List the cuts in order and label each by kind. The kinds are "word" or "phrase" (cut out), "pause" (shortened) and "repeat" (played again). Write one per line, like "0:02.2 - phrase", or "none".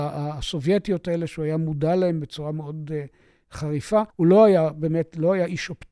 0:04.1 - pause

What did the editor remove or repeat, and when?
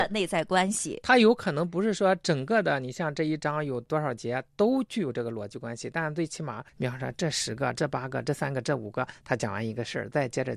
0:06.7 - pause

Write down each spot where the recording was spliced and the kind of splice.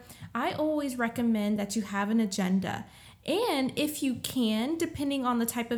none

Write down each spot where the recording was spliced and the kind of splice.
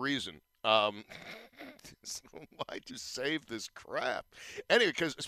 0:02.2 - word
0:02.9 - word

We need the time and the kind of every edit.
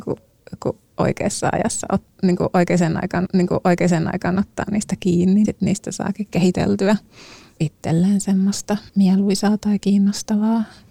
0:03.2 - repeat
0:05.4 - word
0:07.6 - word
0:08.9 - pause

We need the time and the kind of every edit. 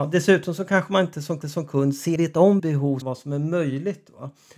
0:01.4 - repeat
0:02.2 - word
0:02.6 - word
0:03.0 - phrase

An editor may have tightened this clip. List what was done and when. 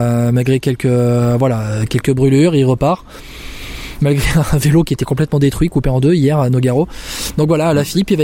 none

